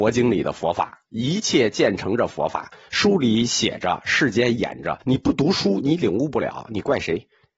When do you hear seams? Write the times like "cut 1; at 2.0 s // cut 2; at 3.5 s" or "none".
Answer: cut 1; at 5.0 s